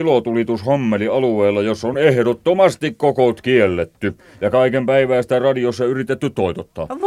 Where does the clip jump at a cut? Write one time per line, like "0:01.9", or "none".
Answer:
none